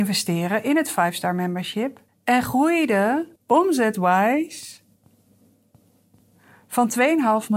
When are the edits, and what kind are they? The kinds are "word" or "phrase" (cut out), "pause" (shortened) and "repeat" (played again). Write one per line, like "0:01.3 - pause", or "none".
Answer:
0:02.1 - pause
0:03.4 - pause